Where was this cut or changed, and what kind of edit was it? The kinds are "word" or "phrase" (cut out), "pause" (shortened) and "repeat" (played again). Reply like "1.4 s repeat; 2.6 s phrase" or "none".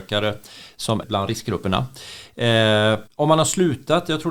1.0 s word; 3.1 s pause